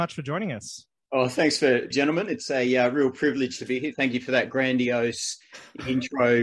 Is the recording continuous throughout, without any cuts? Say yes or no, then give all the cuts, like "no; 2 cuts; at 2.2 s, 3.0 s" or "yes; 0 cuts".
no; 1 cut; at 1.9 s